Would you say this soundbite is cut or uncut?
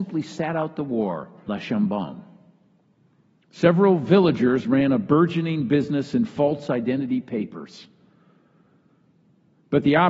cut